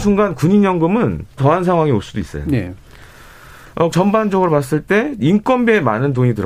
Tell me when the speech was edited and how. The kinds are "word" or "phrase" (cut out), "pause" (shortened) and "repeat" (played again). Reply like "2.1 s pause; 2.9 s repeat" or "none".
1.4 s word; 3.9 s word